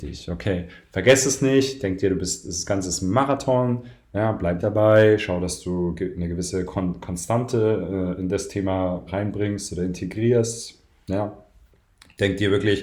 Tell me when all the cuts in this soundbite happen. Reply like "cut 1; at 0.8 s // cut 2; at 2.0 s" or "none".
cut 1; at 4.6 s // cut 2; at 9.1 s